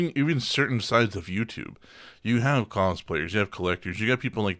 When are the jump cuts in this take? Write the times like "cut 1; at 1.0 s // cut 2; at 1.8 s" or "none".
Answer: none